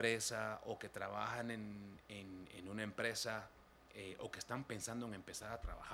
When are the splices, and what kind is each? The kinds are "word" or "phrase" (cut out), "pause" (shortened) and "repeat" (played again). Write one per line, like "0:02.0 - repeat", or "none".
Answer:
none